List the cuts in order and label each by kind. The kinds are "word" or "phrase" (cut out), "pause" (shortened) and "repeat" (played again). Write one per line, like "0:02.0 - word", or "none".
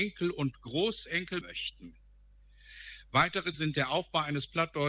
0:01.4 - word
0:03.5 - word

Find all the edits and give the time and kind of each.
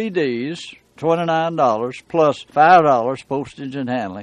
0:01.0 - word
0:02.5 - pause

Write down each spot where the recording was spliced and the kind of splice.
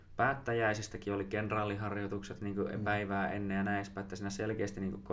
none

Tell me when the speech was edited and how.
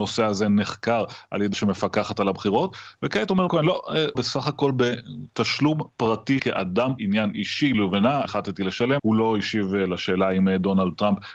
0:01.5 - word
0:03.5 - word
0:04.1 - word
0:06.4 - word
0:07.0 - word
0:07.7 - word
0:08.2 - word
0:09.0 - word

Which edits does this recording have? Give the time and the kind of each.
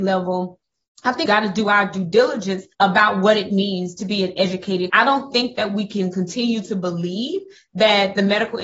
0:01.3 - word
0:02.7 - pause
0:04.9 - word

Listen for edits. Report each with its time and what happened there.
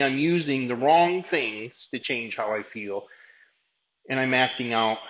none

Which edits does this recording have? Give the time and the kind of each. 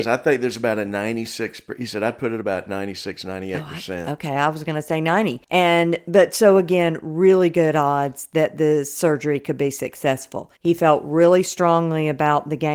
0:05.4 - pause
0:10.6 - pause

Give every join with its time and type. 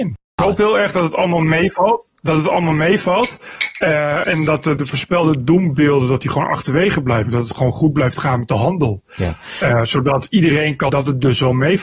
0:02.1 - pause
0:04.2 - word
0:04.8 - word
0:10.9 - phrase

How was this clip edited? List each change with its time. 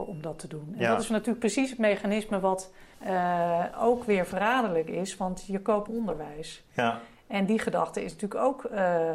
0:02.9 - pause
0:05.9 - phrase

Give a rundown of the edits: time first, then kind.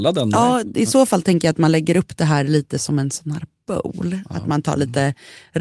none

